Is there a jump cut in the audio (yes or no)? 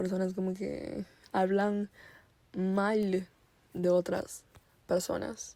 no